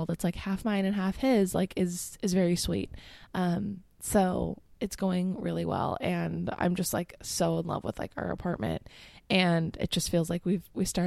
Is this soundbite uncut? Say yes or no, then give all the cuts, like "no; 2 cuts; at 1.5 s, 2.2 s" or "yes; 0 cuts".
yes; 0 cuts